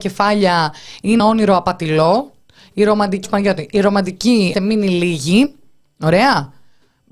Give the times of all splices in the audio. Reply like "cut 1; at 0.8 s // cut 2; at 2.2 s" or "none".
cut 1; at 1.2 s // cut 2; at 3.2 s // cut 3; at 4.5 s

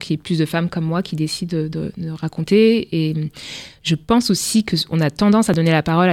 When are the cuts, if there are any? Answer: none

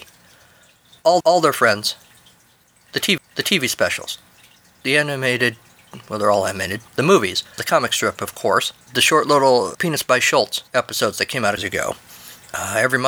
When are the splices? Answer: cut 1; at 1.2 s // cut 2; at 3.2 s // cut 3; at 6.9 s // cut 4; at 7.6 s // cut 5; at 8.8 s // cut 6; at 9.7 s // cut 7; at 10.7 s // cut 8; at 11.6 s

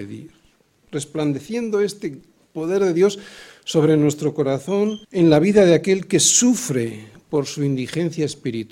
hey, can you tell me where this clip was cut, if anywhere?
cut 1; at 5.0 s

